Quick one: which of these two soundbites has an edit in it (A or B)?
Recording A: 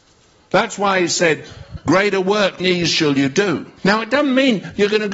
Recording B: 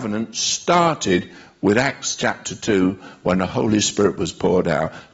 A